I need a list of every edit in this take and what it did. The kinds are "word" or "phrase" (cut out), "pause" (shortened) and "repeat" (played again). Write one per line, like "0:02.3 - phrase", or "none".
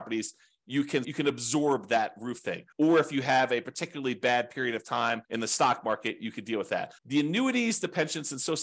0:01.0 - word
0:02.7 - pause
0:05.2 - pause
0:07.0 - pause